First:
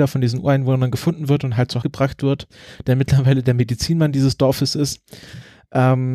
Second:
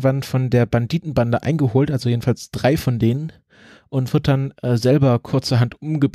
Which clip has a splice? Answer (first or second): first